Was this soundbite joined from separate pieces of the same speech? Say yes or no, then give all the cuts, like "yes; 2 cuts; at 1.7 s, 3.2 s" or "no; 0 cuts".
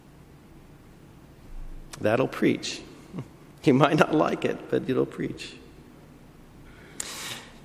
no; 0 cuts